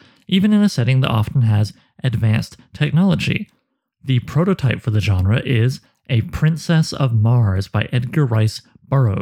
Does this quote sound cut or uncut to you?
uncut